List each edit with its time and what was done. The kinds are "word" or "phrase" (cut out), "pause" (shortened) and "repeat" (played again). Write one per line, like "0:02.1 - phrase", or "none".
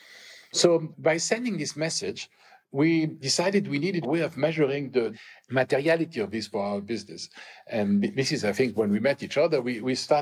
0:04.0 - word